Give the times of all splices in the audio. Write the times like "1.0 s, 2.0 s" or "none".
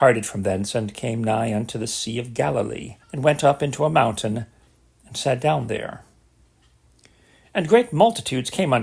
3.0 s